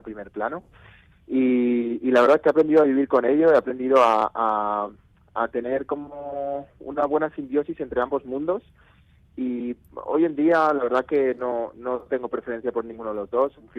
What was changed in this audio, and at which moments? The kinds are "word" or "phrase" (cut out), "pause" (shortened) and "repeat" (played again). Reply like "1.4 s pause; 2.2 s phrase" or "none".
none